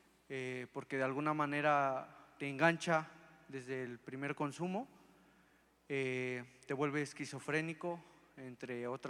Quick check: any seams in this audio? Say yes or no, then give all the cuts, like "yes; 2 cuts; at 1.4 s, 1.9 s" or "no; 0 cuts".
no; 0 cuts